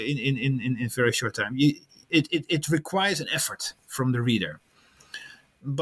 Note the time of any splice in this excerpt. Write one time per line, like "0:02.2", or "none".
none